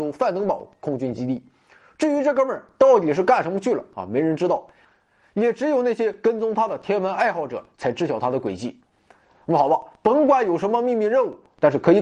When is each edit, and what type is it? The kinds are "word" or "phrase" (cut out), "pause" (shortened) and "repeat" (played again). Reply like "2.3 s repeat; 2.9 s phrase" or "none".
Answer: none